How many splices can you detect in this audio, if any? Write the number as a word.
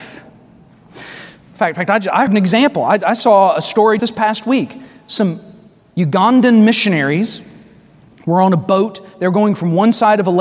two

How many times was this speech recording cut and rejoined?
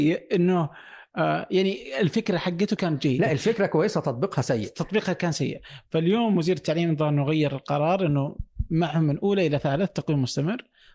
zero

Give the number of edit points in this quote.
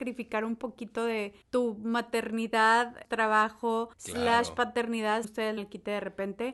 five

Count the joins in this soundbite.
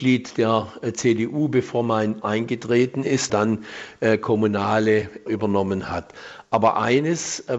three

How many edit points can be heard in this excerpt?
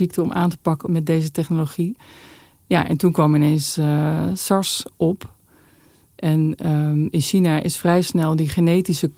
zero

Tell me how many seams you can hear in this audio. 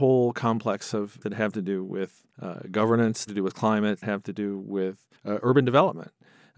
five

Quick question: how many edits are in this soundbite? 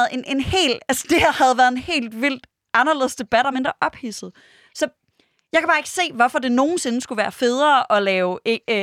one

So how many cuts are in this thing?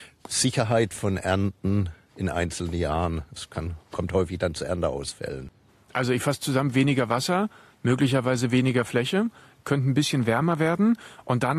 zero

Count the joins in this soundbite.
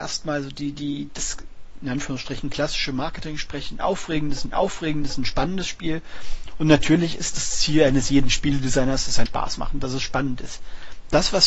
four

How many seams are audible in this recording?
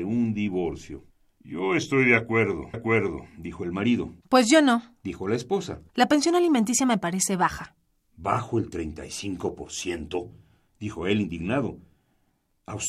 four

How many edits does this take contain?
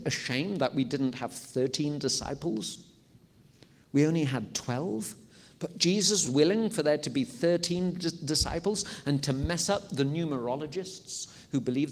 one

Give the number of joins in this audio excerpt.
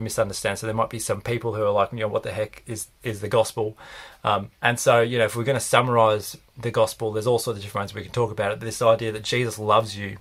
one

